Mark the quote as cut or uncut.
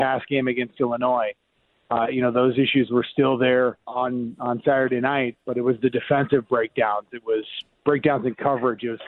cut